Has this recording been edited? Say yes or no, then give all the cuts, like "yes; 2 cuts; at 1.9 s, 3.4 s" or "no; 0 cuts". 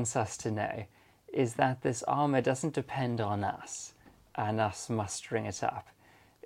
no; 0 cuts